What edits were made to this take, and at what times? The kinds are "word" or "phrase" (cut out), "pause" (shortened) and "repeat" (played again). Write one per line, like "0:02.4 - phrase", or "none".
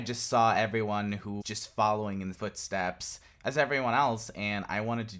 0:01.4 - word
0:02.3 - word